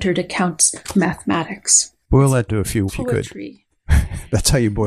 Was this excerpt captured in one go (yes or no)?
no